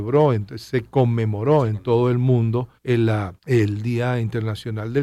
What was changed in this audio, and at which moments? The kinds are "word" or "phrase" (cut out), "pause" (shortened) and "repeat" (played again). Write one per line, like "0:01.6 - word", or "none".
0:02.8 - pause
0:03.4 - pause

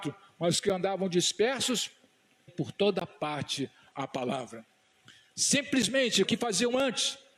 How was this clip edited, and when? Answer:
0:02.5 - word
0:03.9 - word
0:06.2 - phrase

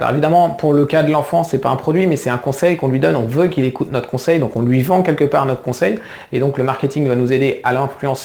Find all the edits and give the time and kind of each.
none

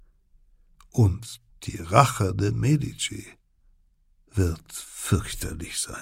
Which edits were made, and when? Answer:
none

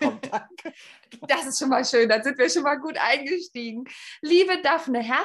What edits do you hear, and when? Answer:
none

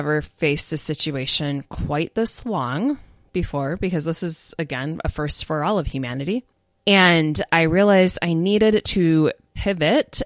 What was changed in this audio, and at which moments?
none

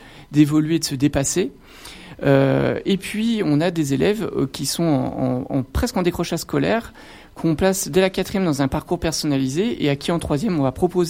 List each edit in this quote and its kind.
none

